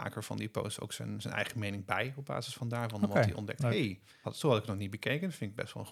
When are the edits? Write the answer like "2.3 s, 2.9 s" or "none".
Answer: 4.2 s